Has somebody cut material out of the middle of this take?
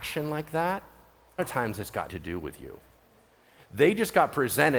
yes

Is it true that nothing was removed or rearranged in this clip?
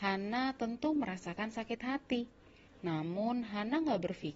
yes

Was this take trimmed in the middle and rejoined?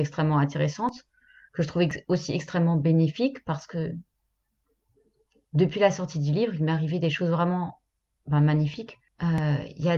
no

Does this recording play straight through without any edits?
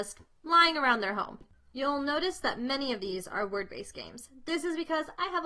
yes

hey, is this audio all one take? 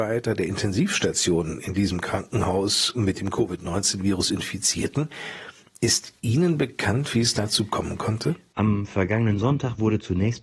yes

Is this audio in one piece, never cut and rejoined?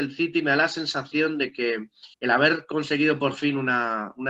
no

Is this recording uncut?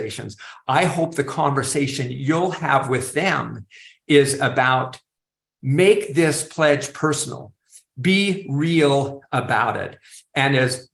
yes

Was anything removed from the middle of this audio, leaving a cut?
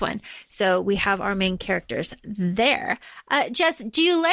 no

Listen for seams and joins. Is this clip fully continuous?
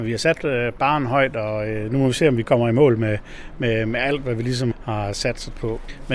yes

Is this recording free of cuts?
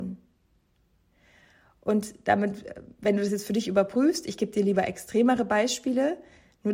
yes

